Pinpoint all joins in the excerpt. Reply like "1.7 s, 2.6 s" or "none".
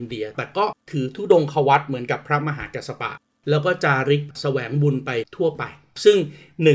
none